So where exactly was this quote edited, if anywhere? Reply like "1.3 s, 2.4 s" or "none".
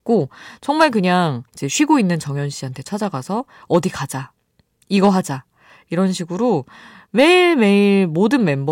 1.5 s